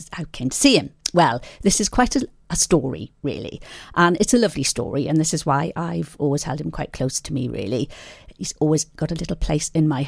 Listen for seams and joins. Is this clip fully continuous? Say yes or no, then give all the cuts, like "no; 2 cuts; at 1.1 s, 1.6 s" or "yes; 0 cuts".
yes; 0 cuts